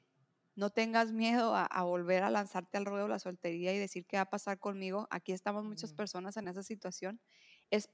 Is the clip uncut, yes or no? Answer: yes